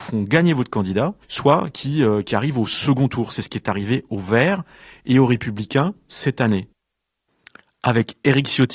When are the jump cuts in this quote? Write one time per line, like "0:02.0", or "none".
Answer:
0:01.2